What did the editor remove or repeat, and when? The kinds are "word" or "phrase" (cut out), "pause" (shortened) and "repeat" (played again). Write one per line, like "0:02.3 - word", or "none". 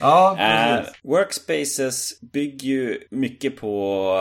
none